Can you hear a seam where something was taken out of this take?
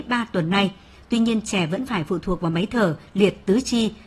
no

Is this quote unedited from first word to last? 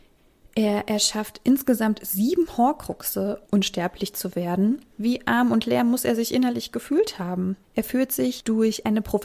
no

